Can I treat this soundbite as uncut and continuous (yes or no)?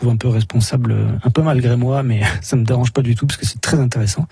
yes